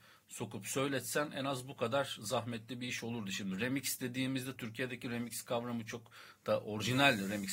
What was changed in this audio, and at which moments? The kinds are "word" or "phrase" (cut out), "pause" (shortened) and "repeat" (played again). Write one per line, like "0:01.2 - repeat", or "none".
0:04.6 - word